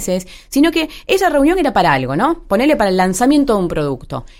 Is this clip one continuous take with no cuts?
yes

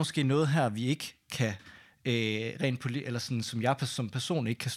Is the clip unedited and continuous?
yes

